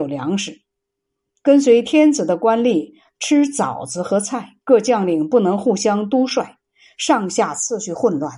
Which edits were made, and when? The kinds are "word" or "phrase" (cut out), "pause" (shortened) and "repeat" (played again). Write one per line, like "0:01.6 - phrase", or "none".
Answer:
0:04.6 - pause